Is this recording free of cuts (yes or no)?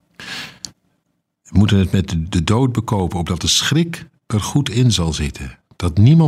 yes